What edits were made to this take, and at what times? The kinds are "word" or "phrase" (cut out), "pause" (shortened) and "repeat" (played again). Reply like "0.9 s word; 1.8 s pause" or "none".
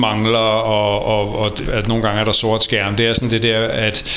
1.7 s word